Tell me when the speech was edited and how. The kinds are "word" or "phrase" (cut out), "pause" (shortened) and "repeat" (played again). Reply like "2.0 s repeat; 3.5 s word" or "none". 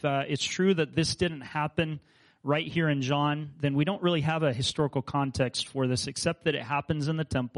none